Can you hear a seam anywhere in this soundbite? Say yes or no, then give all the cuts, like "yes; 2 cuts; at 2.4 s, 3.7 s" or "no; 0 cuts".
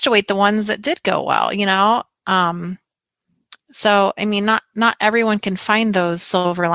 no; 0 cuts